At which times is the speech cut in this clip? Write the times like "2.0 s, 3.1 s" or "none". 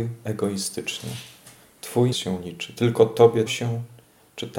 2.1 s, 3.5 s